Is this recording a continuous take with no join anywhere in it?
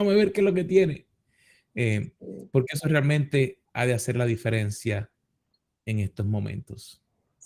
yes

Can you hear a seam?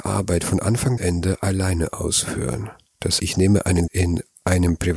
yes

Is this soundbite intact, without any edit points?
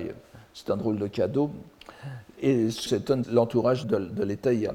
no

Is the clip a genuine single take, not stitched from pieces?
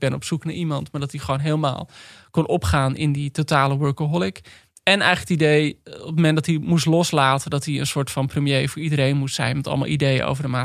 yes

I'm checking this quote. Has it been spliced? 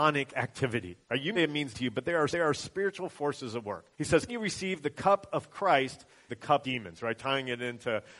yes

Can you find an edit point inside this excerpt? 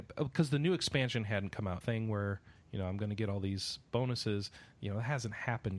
yes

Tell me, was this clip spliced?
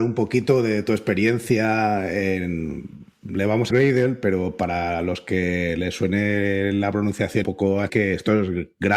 yes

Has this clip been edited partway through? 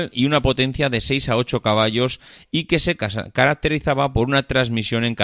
no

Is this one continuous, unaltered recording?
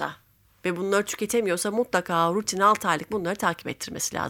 yes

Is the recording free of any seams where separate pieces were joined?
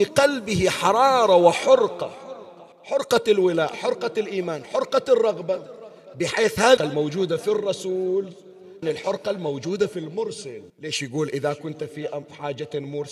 no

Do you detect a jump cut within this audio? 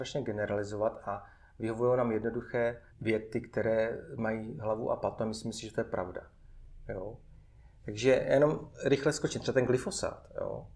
yes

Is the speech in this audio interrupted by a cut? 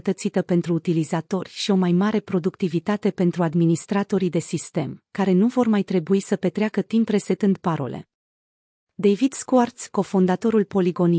no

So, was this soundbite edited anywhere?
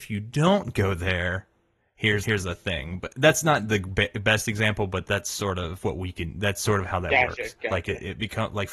yes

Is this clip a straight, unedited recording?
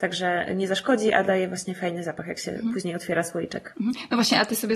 yes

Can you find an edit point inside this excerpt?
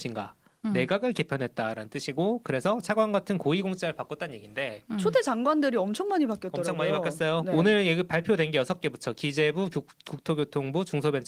yes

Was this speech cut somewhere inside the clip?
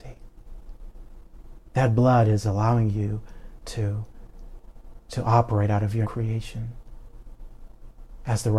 yes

